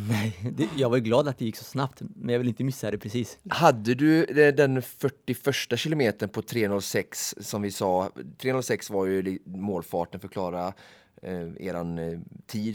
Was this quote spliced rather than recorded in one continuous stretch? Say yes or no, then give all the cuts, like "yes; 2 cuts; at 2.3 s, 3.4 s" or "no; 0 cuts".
no; 0 cuts